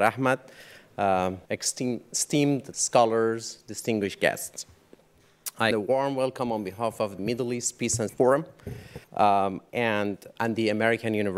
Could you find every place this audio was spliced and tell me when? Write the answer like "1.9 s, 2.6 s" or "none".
1.5 s, 2.7 s, 5.7 s, 7.2 s, 8.1 s, 9.0 s, 10.4 s